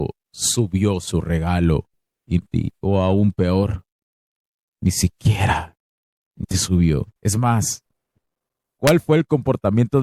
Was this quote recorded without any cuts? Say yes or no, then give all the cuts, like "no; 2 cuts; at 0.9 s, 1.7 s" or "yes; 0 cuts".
no; 3 cuts; at 2.4 s, 6.4 s, 7.2 s